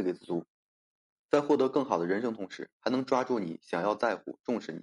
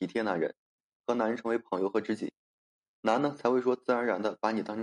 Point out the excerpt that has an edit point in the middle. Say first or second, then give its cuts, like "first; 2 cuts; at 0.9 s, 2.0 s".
first; 1 cut; at 2.7 s